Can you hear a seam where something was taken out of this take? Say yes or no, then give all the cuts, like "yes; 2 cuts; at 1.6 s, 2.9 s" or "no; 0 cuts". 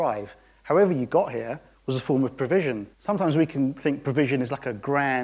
yes; 2 cuts; at 1.7 s, 2.9 s